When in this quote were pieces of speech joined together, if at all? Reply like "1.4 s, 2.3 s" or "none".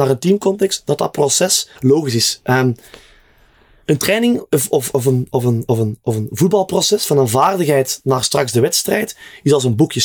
1.8 s